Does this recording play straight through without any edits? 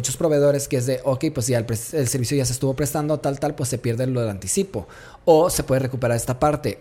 yes; 0 cuts

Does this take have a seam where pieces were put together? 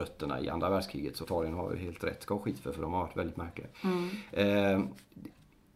yes; 2 cuts; at 1.2 s, 3.7 s

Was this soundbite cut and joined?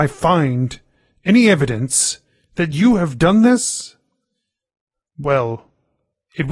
no; 0 cuts

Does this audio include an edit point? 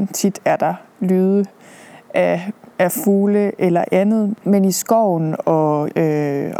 no; 0 cuts

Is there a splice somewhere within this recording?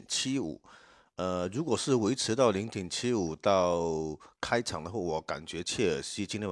no; 0 cuts

